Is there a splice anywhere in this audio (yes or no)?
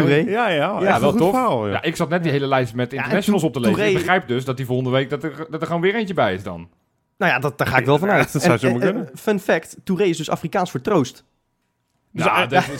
no